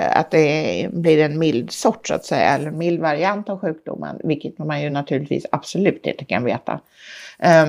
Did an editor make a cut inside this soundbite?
no; 0 cuts

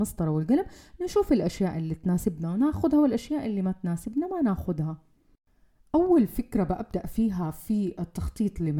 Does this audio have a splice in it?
no; 0 cuts

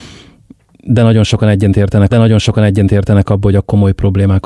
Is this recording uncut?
no; 1 cut; at 2.1 s

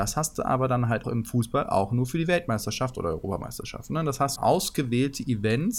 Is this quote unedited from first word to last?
no; 2 cuts; at 1.0 s, 4.4 s

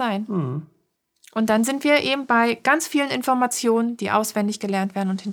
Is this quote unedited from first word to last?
yes; 0 cuts

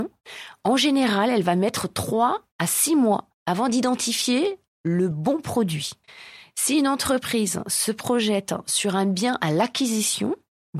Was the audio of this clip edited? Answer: no; 0 cuts

